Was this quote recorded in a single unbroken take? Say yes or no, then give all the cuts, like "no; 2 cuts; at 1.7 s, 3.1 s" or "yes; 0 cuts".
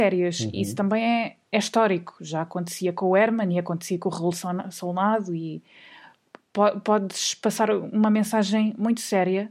yes; 0 cuts